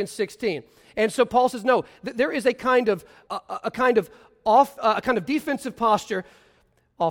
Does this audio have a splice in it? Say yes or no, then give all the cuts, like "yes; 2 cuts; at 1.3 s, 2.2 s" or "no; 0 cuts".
yes; 1 cut; at 3.3 s